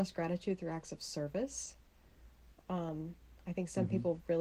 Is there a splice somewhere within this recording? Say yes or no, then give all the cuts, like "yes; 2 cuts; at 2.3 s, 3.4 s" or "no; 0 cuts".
no; 0 cuts